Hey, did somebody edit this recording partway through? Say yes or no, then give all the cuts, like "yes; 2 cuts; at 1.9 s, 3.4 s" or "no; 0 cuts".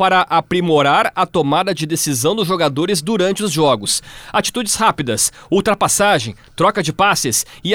no; 0 cuts